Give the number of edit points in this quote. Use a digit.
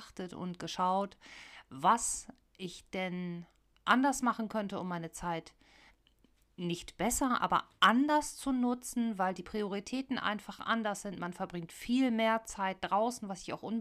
0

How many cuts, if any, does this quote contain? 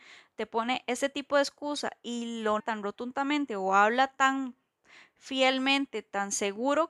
1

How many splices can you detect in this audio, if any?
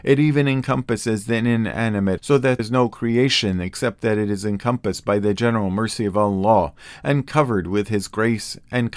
2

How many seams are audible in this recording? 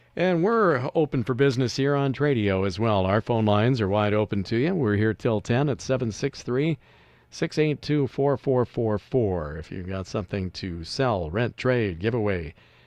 0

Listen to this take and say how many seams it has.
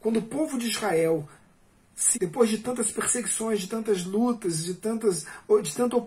1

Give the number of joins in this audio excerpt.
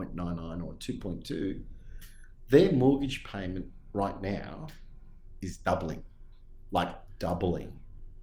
0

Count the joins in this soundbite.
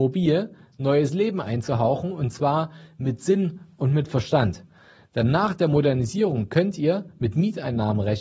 0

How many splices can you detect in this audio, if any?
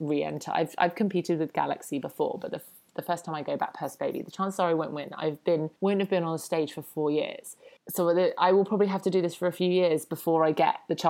2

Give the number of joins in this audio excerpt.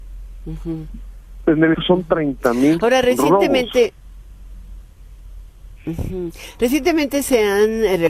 1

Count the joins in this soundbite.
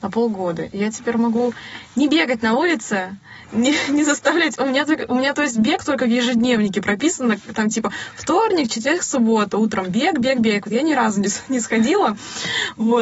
0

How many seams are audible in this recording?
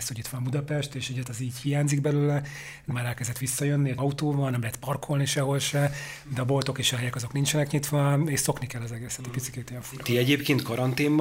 3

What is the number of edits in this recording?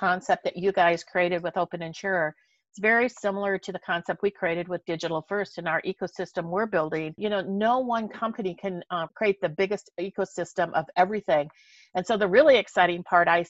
0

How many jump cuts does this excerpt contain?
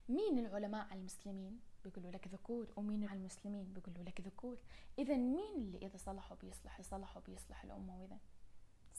2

